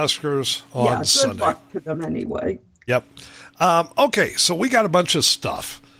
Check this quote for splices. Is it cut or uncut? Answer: uncut